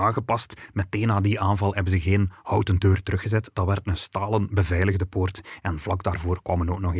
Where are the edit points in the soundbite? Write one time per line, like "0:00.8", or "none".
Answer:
none

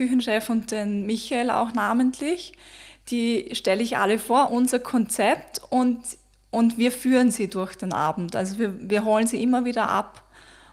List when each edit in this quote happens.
0:04.5

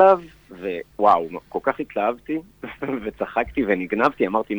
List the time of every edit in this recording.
0:00.9

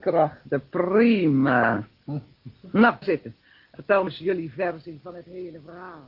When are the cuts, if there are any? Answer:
0:03.0
0:03.7
0:04.1

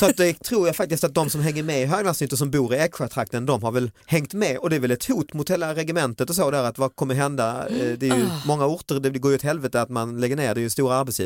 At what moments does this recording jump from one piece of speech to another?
0:04.0

